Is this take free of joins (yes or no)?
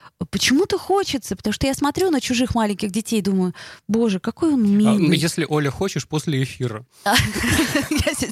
yes